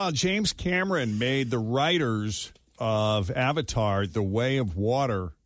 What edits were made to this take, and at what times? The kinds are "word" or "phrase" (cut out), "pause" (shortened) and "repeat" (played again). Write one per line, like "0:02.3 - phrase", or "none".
none